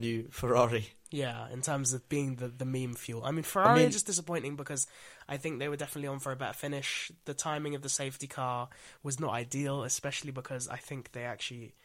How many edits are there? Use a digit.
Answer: 0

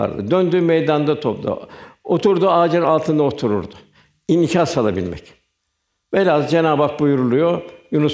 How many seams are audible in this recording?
0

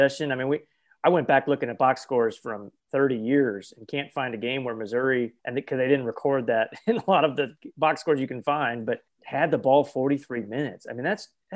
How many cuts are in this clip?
3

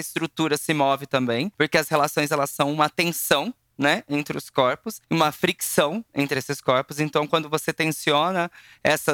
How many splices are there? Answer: 0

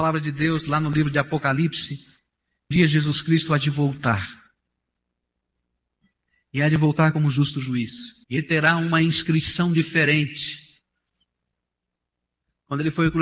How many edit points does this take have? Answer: 2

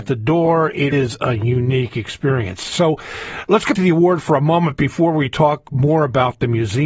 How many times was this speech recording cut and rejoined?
2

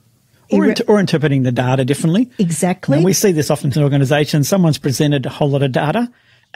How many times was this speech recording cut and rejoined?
1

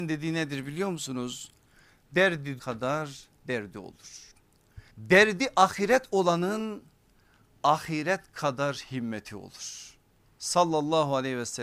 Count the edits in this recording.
2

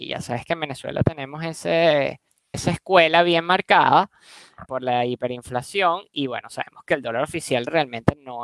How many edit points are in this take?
2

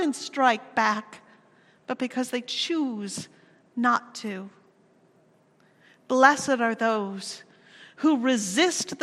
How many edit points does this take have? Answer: 0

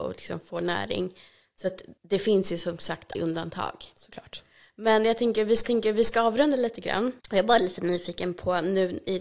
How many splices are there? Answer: 4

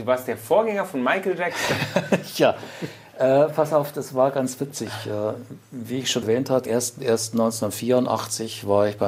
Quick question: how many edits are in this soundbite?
2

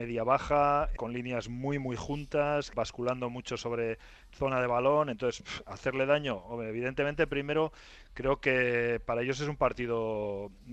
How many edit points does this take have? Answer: 2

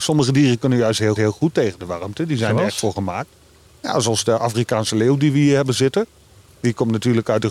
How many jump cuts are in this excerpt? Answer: 1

